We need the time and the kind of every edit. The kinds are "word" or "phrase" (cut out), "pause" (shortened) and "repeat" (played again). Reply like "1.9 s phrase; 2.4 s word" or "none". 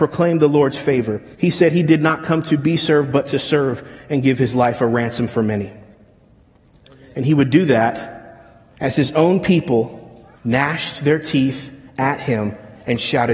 1.3 s pause; 8.7 s pause; 10.3 s pause

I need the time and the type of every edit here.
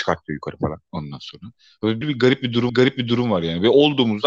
2.0 s word; 2.7 s repeat

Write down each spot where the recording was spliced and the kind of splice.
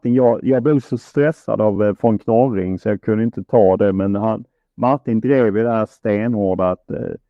none

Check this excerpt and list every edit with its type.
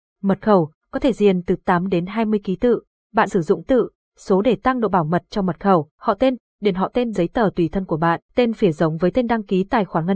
3.3 s word; 3.7 s phrase; 5.9 s pause; 7.1 s phrase; 8.2 s pause

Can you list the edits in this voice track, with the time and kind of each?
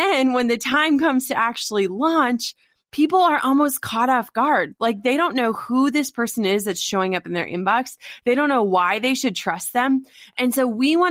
none

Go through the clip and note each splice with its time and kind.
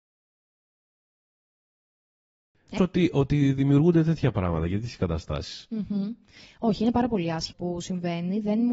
2.8 s phrase; 7.5 s word

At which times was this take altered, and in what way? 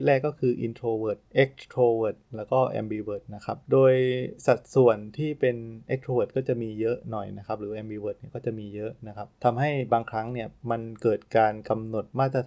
3.7 s pause; 9.3 s pause; 10.6 s pause

